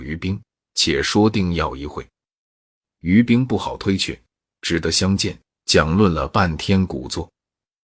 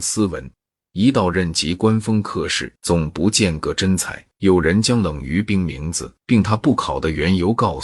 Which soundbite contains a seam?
second; 3 cuts; at 2.8 s, 4.3 s, 6.2 s

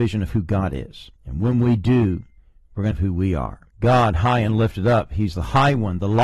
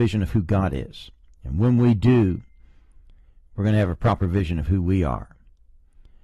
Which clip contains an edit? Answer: first; 4 cuts; at 1.2 s, 2.4 s, 2.9 s, 3.7 s

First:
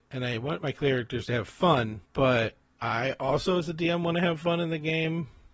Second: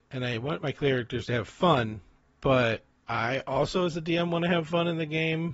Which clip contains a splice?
first; 1 cut; at 2.0 s

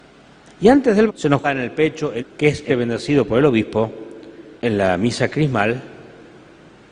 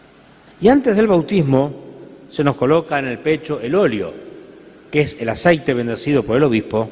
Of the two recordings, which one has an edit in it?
first; 5 cuts; at 1.1 s, 1.4 s, 2.2 s, 2.7 s, 4.6 s

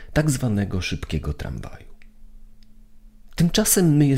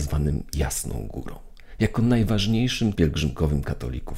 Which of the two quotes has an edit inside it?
second; 1 cut; at 3.0 s

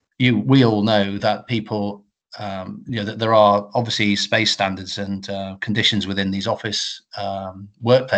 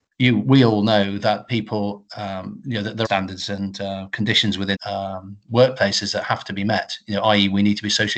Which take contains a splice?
second; 3 cuts; at 2.1 s, 3.0 s, 4.7 s

